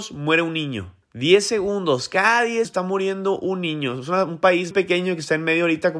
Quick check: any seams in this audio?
yes; 3 cuts; at 1.0 s, 2.6 s, 4.7 s

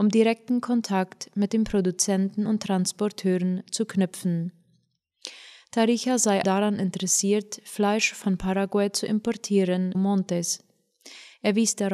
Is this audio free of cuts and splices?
no; 2 cuts; at 6.4 s, 9.9 s

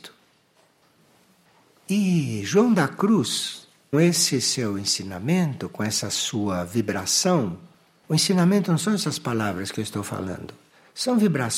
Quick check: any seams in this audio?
yes; 1 cut; at 3.9 s

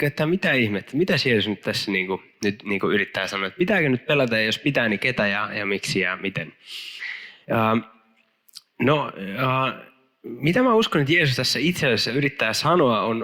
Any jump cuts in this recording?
yes; 1 cut; at 1.6 s

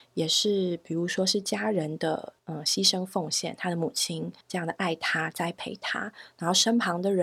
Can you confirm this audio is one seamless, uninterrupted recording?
no; 2 cuts; at 2.4 s, 4.4 s

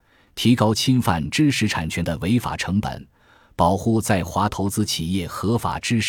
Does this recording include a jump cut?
no; 0 cuts

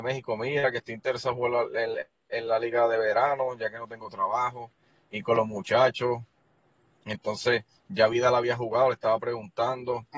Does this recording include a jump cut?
no; 0 cuts

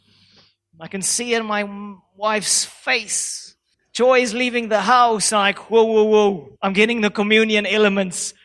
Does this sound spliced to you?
yes; 2 cuts; at 3.7 s, 6.6 s

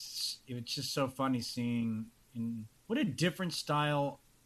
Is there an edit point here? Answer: yes; 1 cut; at 2.8 s

